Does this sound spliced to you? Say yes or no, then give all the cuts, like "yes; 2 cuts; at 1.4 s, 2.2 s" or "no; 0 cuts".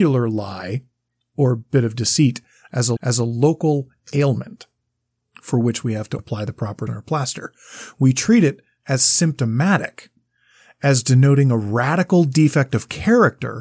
yes; 3 cuts; at 3.0 s, 6.2 s, 6.9 s